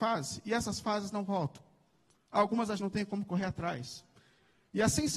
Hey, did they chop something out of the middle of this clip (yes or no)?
yes